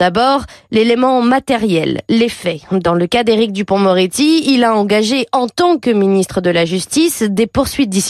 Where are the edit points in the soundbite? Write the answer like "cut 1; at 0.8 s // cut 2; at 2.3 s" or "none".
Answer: none